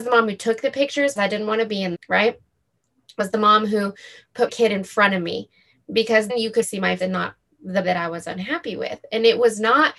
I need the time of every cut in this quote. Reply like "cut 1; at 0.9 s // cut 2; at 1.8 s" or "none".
cut 1; at 1.2 s // cut 2; at 1.9 s // cut 3; at 3.2 s // cut 4; at 4.5 s // cut 5; at 6.3 s // cut 6; at 6.6 s // cut 7; at 7.0 s // cut 8; at 7.8 s